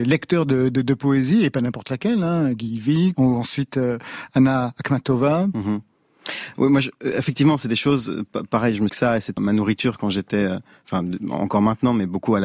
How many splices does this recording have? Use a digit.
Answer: 3